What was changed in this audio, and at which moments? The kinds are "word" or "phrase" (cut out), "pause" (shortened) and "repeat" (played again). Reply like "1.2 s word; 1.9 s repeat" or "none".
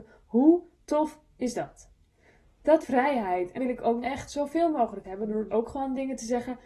2.8 s word; 3.6 s word; 4.0 s word; 5.0 s word; 5.5 s word

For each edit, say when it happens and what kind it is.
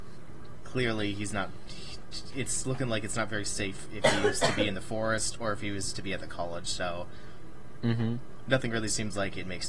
2.6 s phrase

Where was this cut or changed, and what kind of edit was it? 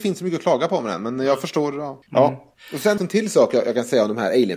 2.0 s pause; 3.0 s phrase

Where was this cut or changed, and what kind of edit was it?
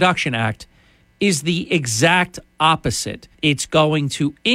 3.3 s pause

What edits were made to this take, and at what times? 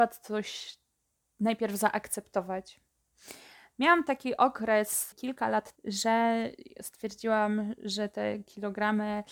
5.1 s word; 5.8 s word

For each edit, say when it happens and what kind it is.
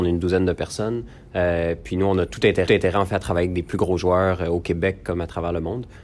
2.7 s repeat

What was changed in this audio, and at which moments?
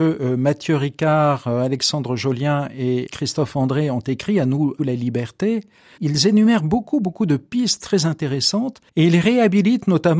8.9 s pause

